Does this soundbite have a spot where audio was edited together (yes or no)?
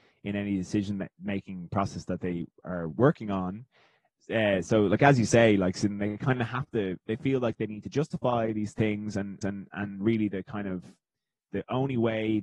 yes